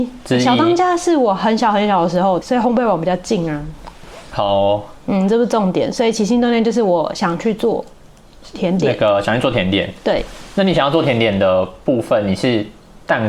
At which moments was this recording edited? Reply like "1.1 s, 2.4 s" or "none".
2.4 s